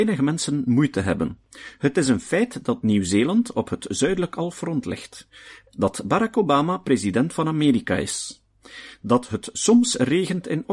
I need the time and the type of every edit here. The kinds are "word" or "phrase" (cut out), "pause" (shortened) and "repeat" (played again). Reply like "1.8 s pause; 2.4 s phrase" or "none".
none